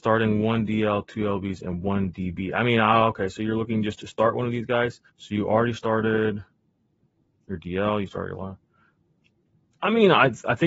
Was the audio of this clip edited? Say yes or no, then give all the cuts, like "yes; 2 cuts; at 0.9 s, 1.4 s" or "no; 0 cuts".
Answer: yes; 1 cut; at 5.1 s